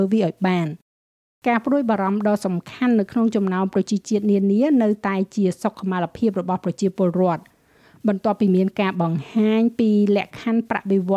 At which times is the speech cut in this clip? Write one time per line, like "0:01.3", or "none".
none